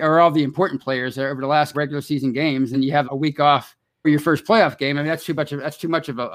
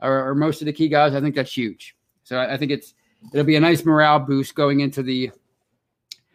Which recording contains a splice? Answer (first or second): first